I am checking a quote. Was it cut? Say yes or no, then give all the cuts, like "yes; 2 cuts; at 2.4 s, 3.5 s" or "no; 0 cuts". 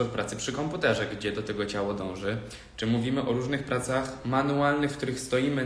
no; 0 cuts